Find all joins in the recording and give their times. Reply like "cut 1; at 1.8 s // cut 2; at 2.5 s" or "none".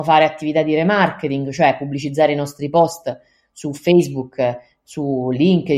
none